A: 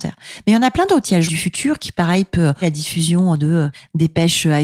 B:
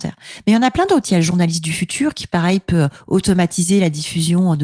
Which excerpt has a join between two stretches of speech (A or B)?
A